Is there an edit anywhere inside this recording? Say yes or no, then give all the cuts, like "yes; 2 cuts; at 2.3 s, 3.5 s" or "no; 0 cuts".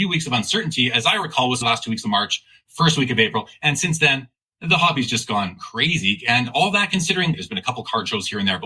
no; 0 cuts